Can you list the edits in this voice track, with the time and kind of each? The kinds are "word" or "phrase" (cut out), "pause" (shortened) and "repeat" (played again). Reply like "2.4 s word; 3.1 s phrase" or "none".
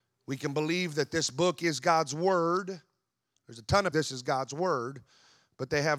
3.9 s phrase